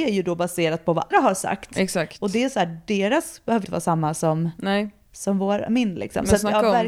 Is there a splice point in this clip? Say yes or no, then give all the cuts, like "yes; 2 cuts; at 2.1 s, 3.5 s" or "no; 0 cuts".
yes; 2 cuts; at 1.1 s, 3.6 s